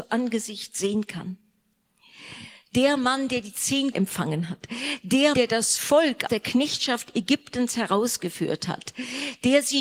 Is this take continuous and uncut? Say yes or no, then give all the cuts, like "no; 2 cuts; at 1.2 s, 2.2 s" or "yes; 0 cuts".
no; 3 cuts; at 3.9 s, 5.3 s, 6.3 s